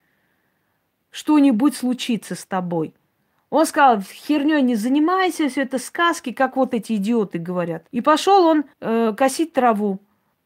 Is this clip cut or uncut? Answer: cut